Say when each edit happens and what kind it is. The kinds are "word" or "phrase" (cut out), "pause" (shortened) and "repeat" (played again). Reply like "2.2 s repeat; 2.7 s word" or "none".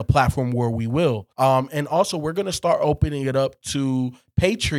1.3 s pause